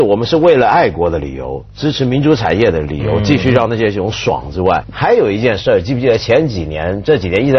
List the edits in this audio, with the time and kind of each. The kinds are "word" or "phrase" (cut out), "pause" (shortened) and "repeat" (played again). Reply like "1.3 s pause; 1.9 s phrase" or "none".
4.8 s word